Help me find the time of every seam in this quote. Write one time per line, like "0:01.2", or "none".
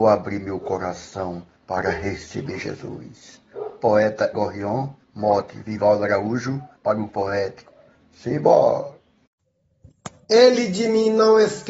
0:01.5
0:04.3
0:05.0
0:06.7
0:07.1